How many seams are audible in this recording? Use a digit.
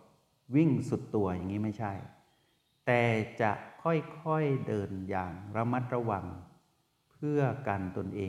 0